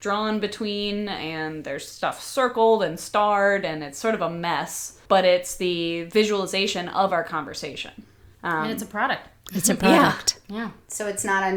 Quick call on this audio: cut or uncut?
cut